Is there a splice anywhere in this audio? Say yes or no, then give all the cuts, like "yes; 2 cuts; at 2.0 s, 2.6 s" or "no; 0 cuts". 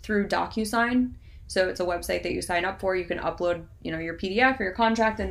no; 0 cuts